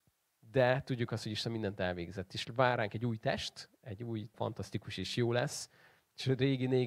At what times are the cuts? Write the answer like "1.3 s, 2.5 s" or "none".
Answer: 4.3 s